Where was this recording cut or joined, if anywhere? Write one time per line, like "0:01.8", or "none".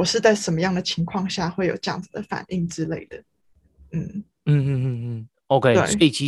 none